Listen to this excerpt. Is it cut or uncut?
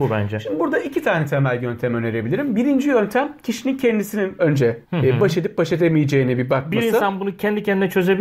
cut